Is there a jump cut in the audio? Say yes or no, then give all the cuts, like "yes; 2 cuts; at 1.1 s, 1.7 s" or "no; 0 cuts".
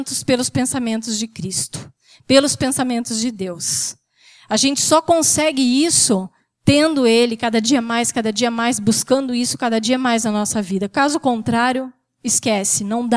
no; 0 cuts